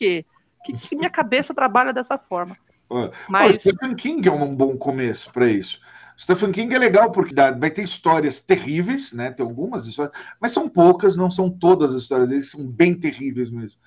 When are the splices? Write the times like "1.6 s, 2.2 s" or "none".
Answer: 7.3 s